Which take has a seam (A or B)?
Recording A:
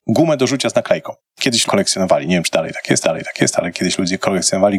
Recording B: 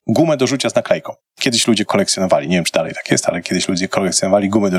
A